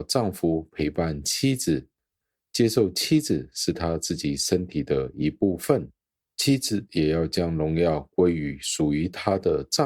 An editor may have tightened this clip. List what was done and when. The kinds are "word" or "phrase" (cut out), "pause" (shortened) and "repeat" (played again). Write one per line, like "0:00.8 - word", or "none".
none